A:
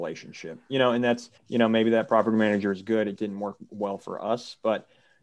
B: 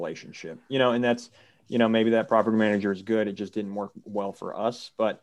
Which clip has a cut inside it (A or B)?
A